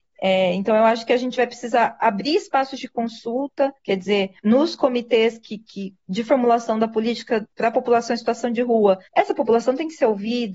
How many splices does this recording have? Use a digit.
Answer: 4